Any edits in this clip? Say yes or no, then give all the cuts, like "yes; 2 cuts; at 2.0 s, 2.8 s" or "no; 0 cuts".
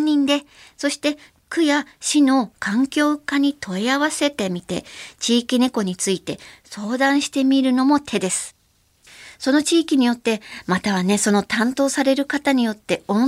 no; 0 cuts